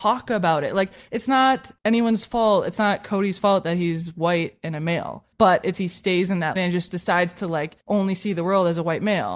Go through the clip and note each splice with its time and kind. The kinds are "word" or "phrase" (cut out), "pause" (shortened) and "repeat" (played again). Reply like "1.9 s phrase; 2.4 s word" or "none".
1.8 s pause; 5.3 s pause; 5.7 s phrase; 6.6 s word; 7.8 s pause